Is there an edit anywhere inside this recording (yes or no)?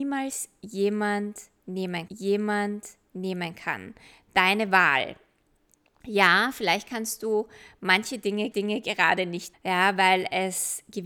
yes